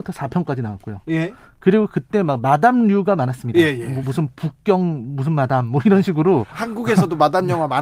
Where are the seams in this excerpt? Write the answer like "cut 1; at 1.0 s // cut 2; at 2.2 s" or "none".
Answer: none